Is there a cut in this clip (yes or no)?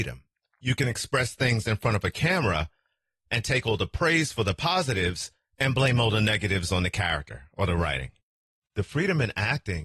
no